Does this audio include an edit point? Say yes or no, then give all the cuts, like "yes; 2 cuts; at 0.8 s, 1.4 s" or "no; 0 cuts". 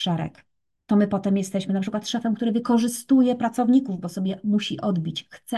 no; 0 cuts